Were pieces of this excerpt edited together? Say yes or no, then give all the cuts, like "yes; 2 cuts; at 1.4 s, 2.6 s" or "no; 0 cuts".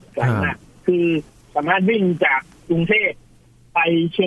yes; 1 cut; at 1.3 s